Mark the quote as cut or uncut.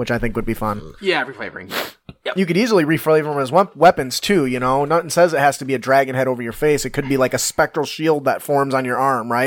cut